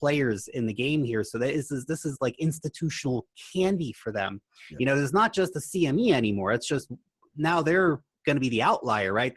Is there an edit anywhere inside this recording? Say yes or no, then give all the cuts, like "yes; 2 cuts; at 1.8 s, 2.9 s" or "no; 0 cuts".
no; 0 cuts